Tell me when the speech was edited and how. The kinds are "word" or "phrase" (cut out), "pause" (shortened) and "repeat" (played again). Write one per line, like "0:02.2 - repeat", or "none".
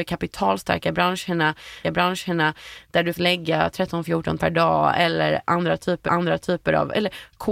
0:01.8 - repeat
0:03.1 - word
0:04.4 - word
0:06.1 - repeat